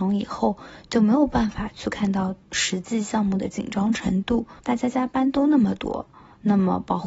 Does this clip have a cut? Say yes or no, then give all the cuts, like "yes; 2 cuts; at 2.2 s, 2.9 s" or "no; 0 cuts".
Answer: yes; 2 cuts; at 2.4 s, 4.6 s